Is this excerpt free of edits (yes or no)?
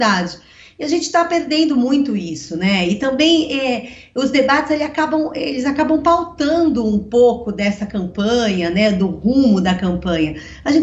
yes